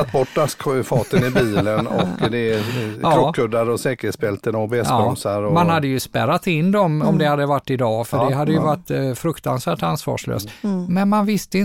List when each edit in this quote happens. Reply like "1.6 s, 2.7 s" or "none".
none